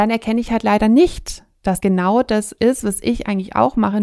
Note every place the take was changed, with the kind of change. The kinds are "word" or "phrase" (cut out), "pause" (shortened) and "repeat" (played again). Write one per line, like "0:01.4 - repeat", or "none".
0:01.8 - word